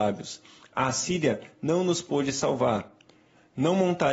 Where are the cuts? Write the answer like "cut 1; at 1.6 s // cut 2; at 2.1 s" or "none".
none